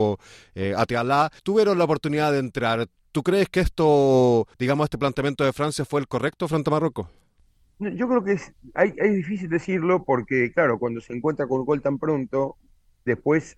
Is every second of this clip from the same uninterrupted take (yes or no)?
no